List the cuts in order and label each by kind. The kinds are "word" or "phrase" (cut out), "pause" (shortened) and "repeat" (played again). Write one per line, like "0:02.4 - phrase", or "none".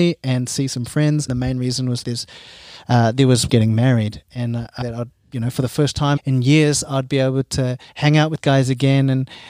0:01.3 - word
0:02.0 - word
0:03.5 - phrase
0:04.8 - word
0:06.2 - word
0:07.9 - pause
0:08.4 - word